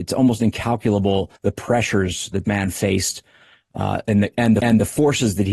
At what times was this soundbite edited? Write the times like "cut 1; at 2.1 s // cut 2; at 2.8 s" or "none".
cut 1; at 1.4 s // cut 2; at 2.4 s // cut 3; at 4.6 s